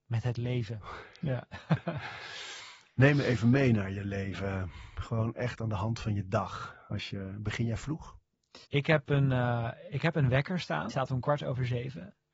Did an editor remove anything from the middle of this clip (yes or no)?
yes